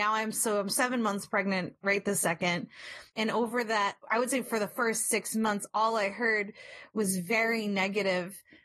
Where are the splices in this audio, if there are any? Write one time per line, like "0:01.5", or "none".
0:03.1